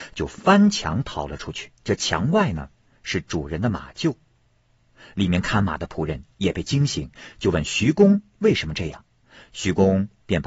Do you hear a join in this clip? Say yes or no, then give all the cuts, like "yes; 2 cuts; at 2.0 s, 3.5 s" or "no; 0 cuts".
yes; 1 cut; at 1.8 s